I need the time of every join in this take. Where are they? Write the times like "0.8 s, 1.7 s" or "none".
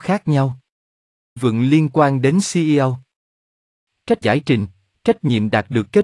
1.4 s, 4.2 s

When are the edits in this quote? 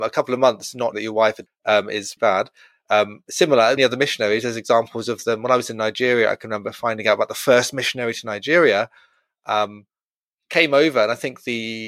0.9 s, 1.5 s, 2.2 s, 3.8 s

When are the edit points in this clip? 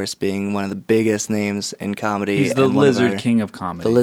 none

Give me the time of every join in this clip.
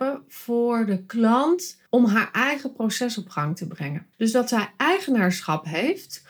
1.9 s, 4.1 s

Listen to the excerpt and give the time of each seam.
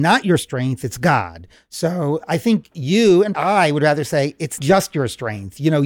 3.3 s, 4.6 s

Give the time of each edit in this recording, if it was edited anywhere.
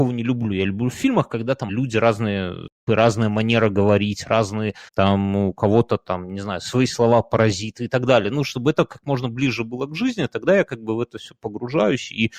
1.7 s, 2.9 s, 4.9 s

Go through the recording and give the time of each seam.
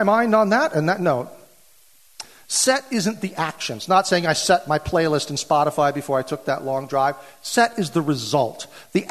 none

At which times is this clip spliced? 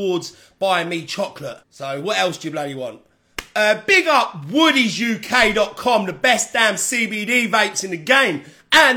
1.6 s

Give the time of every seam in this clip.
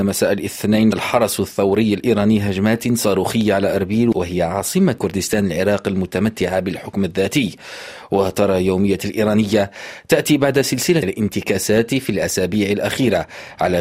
0.9 s, 5.0 s, 9.0 s, 11.0 s

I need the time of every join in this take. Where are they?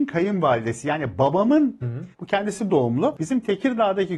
1.8 s, 2.1 s, 2.7 s

